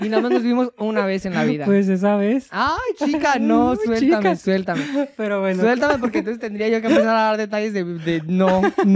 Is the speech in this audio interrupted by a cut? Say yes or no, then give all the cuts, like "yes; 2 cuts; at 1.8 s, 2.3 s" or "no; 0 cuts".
no; 0 cuts